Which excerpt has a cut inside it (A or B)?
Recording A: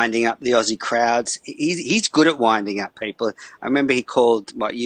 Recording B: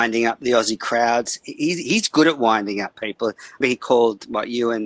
B